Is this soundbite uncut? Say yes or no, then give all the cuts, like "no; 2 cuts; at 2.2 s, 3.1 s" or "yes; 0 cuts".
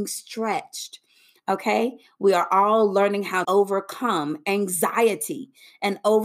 no; 1 cut; at 3.4 s